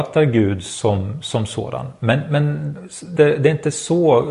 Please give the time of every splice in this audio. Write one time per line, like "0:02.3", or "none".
0:03.2